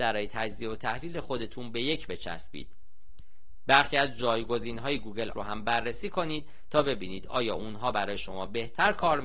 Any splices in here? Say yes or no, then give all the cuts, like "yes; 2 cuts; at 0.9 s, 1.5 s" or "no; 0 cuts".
yes; 2 cuts; at 2.1 s, 5.3 s